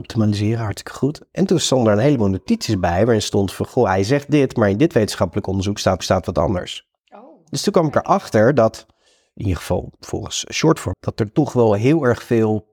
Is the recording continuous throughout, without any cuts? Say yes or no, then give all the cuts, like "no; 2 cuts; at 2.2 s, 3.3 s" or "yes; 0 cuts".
no; 4 cuts; at 6.0 s, 7.0 s, 9.1 s, 10.9 s